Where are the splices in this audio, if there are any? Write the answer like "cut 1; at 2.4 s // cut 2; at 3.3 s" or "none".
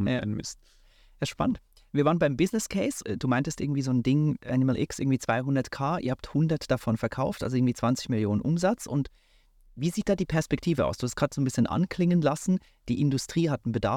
cut 1; at 3.0 s // cut 2; at 4.4 s